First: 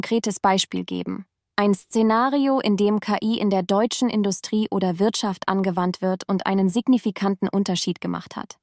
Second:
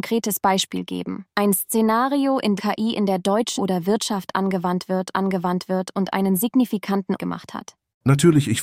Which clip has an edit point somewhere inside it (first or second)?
second